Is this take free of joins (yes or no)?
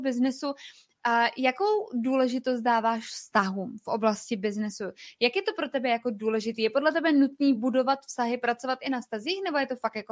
yes